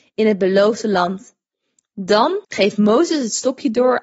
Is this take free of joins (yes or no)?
no